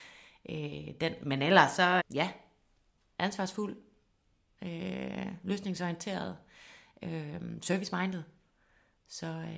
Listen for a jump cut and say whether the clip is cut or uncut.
cut